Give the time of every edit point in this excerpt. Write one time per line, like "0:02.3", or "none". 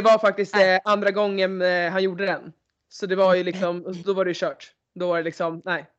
none